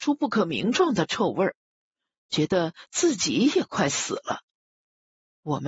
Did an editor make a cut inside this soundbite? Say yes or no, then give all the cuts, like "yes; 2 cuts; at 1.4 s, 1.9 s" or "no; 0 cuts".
no; 0 cuts